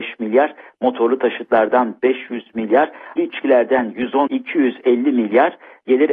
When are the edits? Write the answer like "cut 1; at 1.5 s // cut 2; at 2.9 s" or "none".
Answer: cut 1; at 3.2 s // cut 2; at 4.3 s